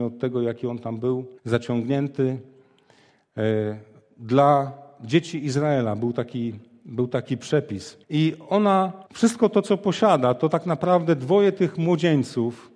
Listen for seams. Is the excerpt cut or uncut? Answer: cut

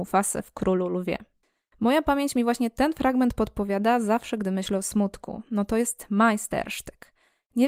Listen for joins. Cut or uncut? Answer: uncut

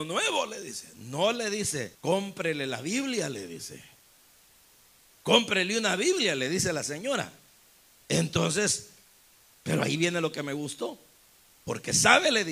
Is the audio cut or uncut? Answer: cut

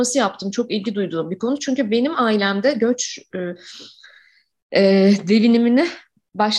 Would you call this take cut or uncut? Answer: uncut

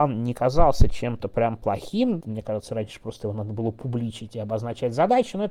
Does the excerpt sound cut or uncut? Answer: cut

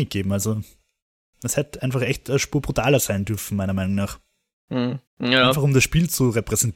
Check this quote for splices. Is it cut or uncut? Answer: cut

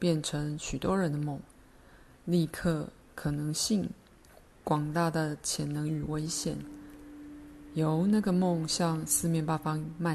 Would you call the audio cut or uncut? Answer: uncut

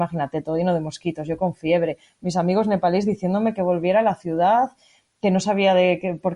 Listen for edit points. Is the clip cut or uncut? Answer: uncut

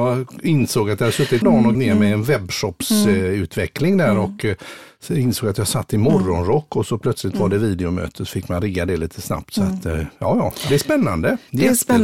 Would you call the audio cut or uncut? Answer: cut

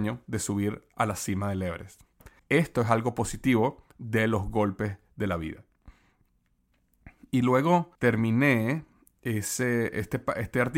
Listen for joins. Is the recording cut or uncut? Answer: cut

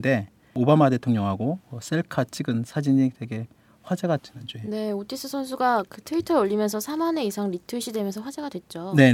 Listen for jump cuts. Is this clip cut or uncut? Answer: cut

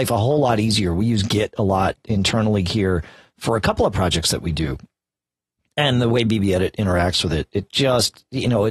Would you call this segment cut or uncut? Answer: uncut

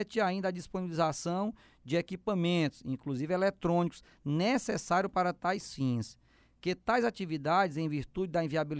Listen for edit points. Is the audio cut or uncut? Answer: uncut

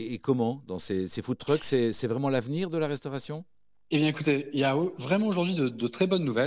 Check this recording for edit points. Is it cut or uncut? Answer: uncut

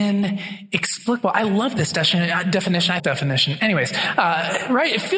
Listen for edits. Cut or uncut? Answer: cut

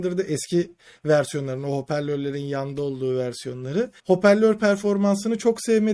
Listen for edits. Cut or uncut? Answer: cut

